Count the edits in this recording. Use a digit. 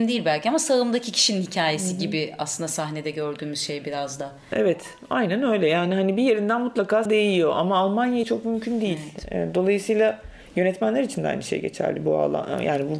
2